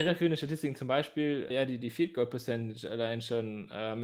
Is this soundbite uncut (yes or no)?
no